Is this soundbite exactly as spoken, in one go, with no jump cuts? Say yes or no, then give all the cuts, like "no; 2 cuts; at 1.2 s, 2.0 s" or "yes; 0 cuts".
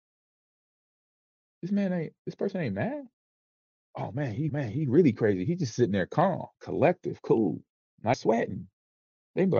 no; 3 cuts; at 4.5 s, 6.5 s, 8.1 s